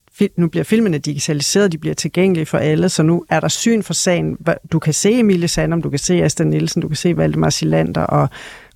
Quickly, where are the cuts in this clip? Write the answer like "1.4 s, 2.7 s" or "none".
none